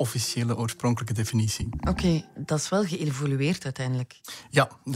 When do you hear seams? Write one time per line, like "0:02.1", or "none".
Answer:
0:02.4